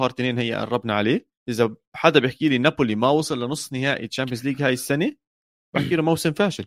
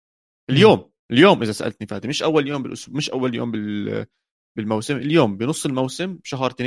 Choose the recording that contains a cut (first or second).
first